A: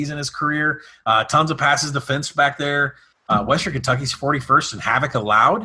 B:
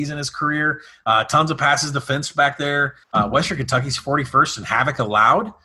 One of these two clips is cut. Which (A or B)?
B